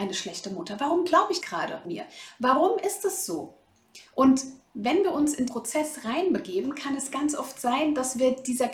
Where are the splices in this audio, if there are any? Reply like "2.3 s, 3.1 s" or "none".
1.4 s, 1.8 s, 5.5 s

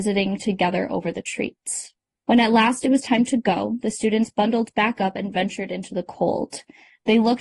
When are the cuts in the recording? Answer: 2.1 s

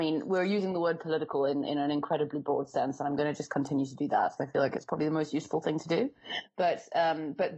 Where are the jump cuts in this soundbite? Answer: 4.4 s

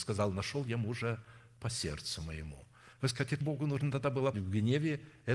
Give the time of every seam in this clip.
2.9 s, 3.4 s, 4.3 s

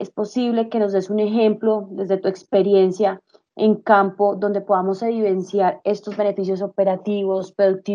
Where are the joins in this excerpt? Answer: none

